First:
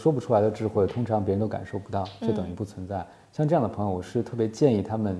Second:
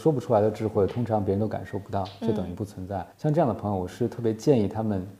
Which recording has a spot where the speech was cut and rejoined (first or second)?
second